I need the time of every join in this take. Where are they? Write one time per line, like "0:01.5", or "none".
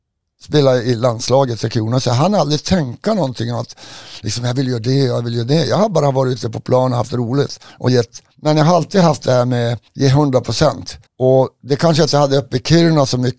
0:08.3
0:09.9
0:11.1